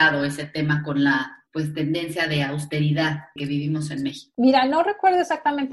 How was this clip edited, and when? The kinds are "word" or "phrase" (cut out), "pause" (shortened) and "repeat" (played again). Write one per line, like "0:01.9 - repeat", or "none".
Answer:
none